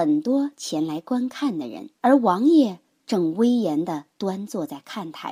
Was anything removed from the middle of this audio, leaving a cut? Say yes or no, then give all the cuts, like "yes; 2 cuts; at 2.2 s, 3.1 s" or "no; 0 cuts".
yes; 1 cut; at 2.0 s